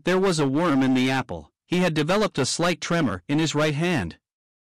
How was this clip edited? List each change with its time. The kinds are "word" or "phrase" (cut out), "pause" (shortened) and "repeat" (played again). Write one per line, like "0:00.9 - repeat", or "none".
0:01.6 - pause